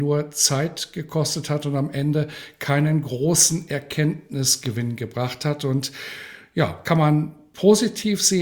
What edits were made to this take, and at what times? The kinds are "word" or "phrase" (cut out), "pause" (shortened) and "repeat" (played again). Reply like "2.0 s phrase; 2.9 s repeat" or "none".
none